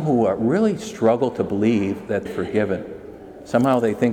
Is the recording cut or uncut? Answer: cut